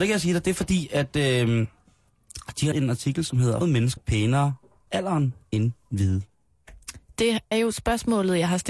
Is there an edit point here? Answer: yes; 5 cuts; at 2.7 s, 3.6 s, 4.0 s, 4.9 s, 7.5 s

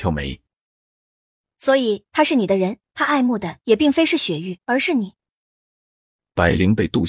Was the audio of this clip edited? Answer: yes; 1 cut; at 4.6 s

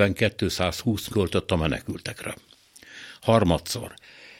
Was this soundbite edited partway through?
yes; 1 cut; at 1.1 s

